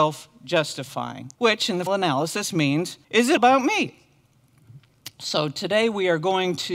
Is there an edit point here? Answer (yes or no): yes